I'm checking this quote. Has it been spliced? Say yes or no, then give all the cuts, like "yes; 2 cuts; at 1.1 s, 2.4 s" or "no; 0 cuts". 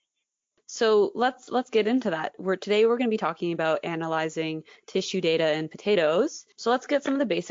no; 0 cuts